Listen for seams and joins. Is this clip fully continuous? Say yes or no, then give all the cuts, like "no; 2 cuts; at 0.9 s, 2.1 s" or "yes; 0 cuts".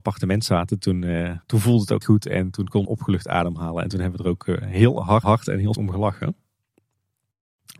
no; 5 cuts; at 1.4 s, 2.0 s, 2.9 s, 5.2 s, 5.8 s